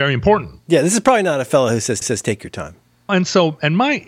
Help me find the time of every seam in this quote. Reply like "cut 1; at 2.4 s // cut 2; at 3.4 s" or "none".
cut 1; at 2.0 s // cut 2; at 3.1 s